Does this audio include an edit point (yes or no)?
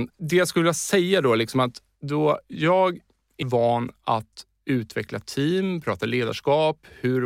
yes